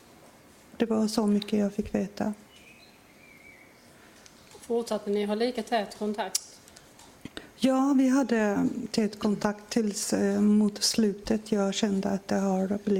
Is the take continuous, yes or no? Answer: yes